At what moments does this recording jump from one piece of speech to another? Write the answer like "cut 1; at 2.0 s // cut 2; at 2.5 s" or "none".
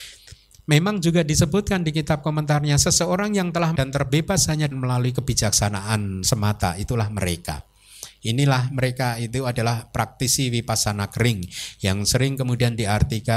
cut 1; at 3.8 s // cut 2; at 4.7 s